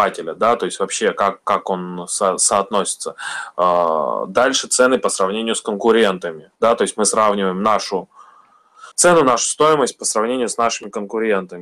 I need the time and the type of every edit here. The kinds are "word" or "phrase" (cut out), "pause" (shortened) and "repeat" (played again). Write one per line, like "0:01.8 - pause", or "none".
0:06.6 - pause
0:08.9 - pause